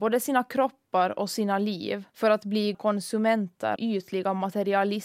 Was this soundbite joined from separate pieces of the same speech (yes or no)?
yes